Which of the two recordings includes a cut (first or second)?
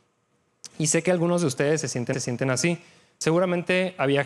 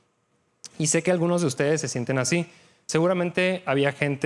first